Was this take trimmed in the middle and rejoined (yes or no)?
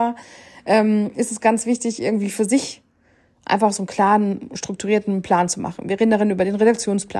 no